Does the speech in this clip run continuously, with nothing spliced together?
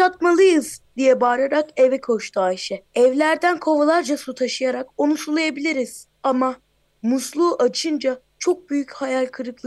no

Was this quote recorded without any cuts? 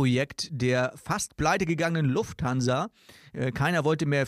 yes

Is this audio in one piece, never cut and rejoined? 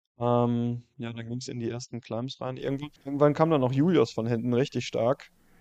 no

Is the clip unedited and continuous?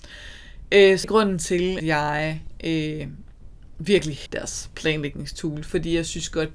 no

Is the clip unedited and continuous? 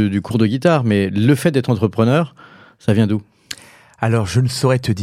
yes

